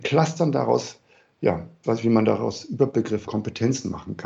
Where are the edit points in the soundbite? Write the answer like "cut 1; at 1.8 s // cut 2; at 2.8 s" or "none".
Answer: cut 1; at 1.8 s // cut 2; at 3.3 s